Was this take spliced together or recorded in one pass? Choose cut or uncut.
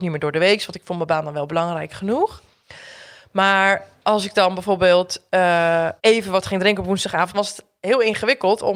cut